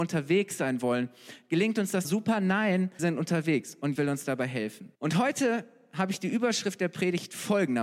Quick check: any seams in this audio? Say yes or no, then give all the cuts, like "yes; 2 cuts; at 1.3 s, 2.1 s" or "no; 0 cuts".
yes; 4 cuts; at 2.0 s, 3.0 s, 3.9 s, 4.9 s